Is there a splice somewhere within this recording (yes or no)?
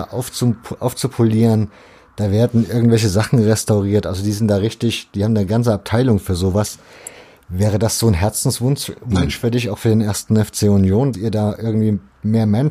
yes